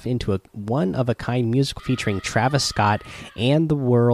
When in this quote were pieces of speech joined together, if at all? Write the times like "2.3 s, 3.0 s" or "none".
1.8 s

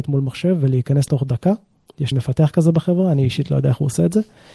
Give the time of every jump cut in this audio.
1.1 s, 2.1 s

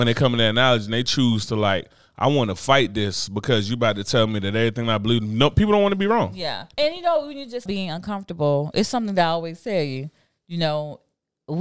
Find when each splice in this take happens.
6.7 s, 7.7 s

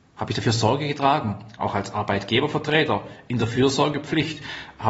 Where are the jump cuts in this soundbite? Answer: none

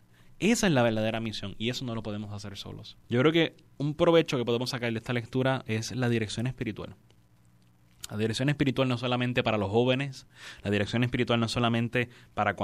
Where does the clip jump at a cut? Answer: 3.0 s

